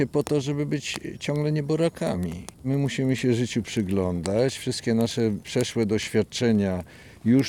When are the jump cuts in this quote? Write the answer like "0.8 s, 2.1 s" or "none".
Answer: 2.5 s